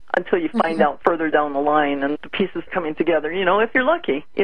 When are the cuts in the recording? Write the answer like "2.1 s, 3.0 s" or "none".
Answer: 1.0 s, 2.2 s, 2.7 s